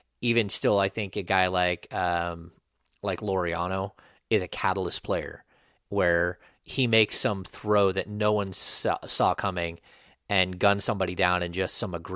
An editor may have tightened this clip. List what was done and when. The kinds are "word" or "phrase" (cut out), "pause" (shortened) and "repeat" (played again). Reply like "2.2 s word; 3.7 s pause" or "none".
none